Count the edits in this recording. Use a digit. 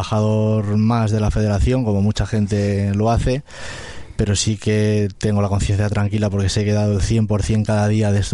0